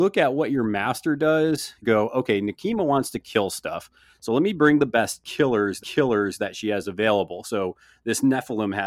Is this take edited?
yes; 2 cuts; at 1.8 s, 5.8 s

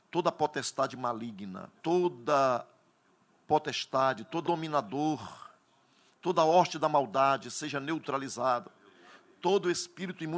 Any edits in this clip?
yes; 2 cuts; at 1.8 s, 4.4 s

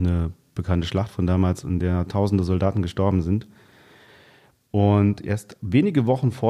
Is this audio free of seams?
yes; 0 cuts

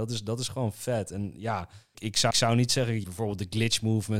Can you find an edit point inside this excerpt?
yes; 3 cuts; at 1.9 s, 2.3 s, 3.0 s

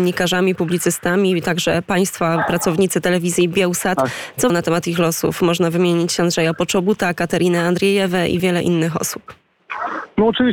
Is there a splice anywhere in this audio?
yes; 2 cuts; at 4.5 s, 8.4 s

